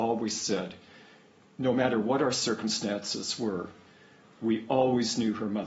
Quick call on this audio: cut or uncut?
uncut